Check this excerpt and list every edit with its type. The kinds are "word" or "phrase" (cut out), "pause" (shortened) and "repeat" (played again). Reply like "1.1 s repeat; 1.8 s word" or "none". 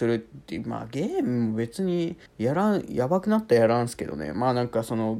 2.3 s pause